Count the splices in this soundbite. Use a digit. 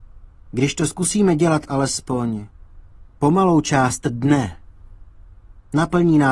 0